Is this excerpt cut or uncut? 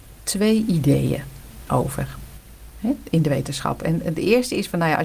uncut